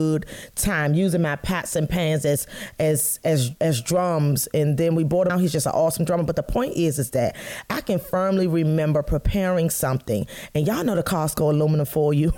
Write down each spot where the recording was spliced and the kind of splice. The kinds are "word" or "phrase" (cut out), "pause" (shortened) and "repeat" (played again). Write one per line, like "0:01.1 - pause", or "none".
0:03.6 - pause
0:05.3 - phrase